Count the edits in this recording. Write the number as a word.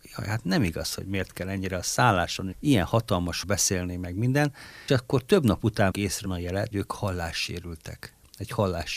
six